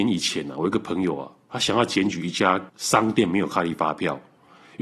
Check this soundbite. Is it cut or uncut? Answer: cut